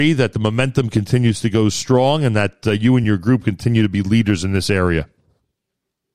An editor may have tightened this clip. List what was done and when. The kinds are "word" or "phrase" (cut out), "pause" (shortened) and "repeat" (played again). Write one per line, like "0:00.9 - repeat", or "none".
none